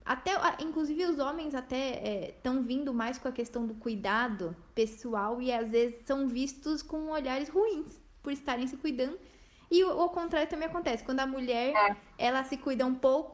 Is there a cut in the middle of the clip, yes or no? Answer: no